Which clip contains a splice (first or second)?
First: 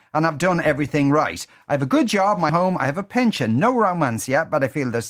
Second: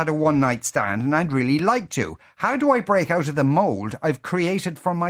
first